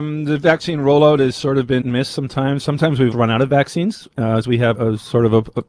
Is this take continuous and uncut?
no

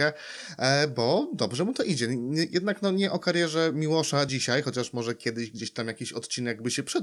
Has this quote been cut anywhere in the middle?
no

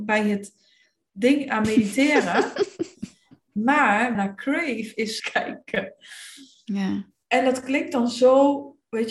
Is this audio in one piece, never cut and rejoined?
no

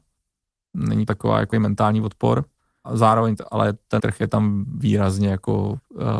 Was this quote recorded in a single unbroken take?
no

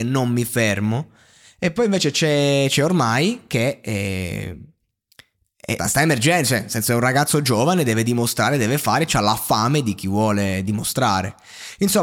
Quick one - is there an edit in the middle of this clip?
yes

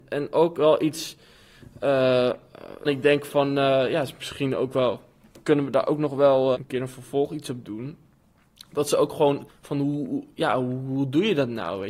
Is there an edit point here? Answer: yes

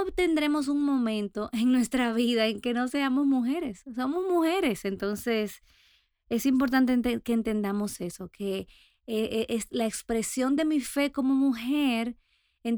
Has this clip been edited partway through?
no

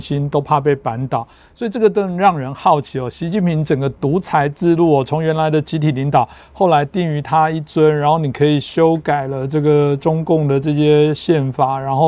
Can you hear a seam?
no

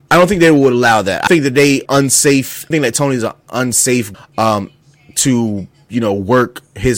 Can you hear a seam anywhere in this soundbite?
yes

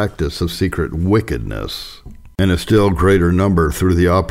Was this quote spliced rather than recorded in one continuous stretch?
no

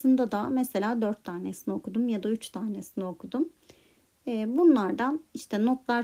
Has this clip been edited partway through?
no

